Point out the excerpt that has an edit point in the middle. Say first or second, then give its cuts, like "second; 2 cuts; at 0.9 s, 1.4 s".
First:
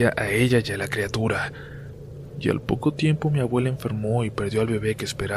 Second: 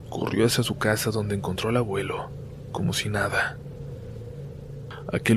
second; 1 cut; at 2.7 s